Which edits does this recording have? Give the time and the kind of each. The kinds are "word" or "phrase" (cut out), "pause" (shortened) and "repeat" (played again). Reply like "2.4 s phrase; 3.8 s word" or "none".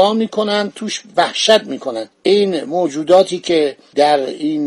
2.1 s pause